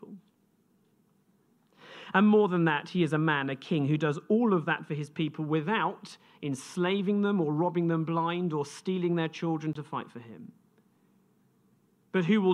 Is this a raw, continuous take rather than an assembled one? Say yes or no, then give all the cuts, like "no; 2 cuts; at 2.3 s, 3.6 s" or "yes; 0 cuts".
yes; 0 cuts